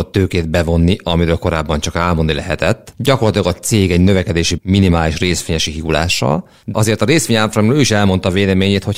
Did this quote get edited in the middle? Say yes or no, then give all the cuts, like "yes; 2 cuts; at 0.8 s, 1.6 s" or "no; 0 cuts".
yes; 1 cut; at 4.6 s